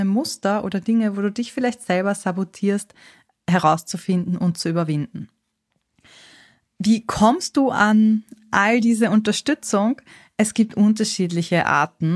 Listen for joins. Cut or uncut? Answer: uncut